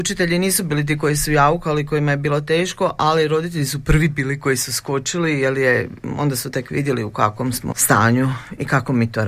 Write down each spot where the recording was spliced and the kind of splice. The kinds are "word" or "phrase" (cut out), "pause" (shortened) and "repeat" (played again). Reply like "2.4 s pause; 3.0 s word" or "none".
7.7 s word